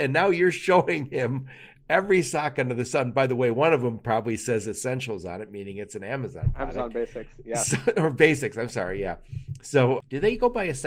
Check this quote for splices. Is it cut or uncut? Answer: uncut